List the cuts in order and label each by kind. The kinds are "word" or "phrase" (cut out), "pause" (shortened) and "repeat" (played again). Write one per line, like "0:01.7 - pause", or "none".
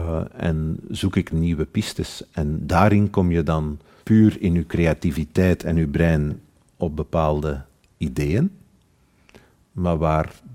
0:01.3 - word
0:04.0 - word